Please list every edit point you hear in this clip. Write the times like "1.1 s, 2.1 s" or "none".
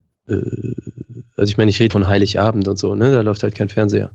1.9 s